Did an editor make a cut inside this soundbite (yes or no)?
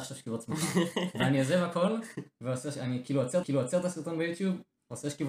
yes